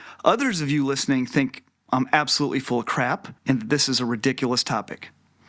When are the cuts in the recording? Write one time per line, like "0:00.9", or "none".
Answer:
0:03.4